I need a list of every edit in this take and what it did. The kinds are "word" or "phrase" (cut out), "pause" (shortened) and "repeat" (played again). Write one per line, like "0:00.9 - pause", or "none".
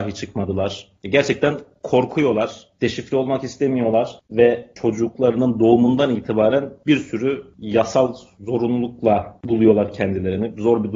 0:02.7 - pause